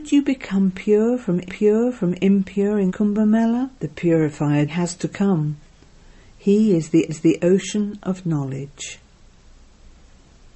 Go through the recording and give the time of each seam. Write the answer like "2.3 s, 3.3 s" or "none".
1.5 s, 2.9 s, 3.8 s, 4.7 s, 7.1 s